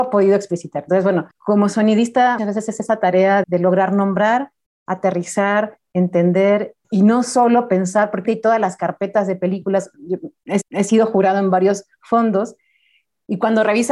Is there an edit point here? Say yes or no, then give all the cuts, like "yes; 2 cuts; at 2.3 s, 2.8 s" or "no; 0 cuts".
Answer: yes; 6 cuts; at 1.3 s, 2.4 s, 3.4 s, 6.8 s, 8.2 s, 10.6 s